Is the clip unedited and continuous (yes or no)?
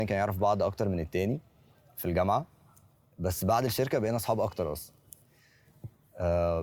yes